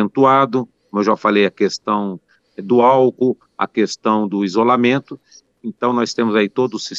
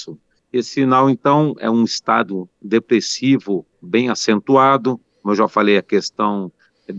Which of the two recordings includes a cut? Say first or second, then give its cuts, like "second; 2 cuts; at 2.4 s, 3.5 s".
second; 1 cut; at 3.7 s